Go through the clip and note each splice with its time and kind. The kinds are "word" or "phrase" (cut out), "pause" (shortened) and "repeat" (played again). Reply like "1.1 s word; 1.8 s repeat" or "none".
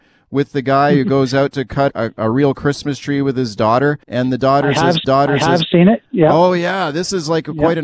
1.9 s word; 4.0 s pause; 5.0 s repeat

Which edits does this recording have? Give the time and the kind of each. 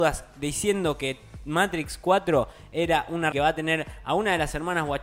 3.3 s phrase

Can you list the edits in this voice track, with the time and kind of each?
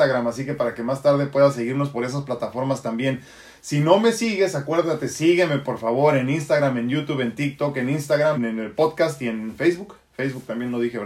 8.4 s word

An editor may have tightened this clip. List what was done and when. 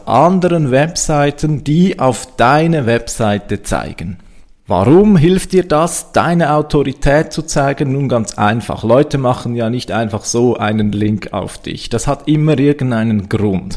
none

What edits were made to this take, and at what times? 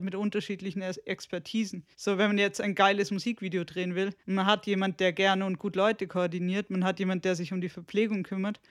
1.9 s pause; 4.2 s pause

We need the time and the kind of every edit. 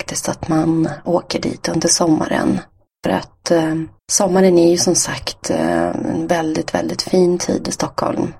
2.9 s pause; 4.0 s pause

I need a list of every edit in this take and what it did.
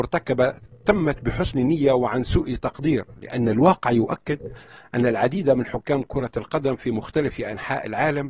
none

